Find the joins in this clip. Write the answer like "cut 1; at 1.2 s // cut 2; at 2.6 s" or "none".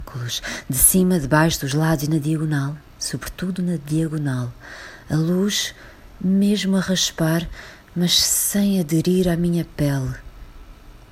none